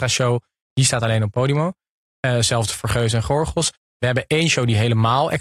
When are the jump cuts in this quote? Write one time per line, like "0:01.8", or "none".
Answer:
none